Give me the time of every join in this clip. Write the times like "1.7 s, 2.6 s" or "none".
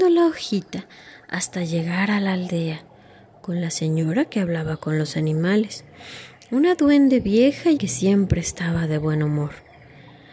7.8 s

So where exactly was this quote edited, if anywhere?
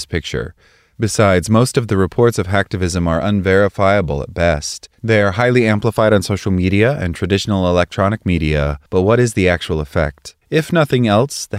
4.9 s, 8.9 s, 10.4 s

